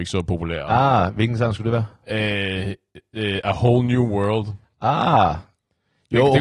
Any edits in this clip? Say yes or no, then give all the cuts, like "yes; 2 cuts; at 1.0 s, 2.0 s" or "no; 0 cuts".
no; 0 cuts